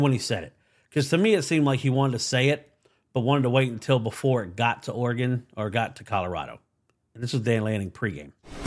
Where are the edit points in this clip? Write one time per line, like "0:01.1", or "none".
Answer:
none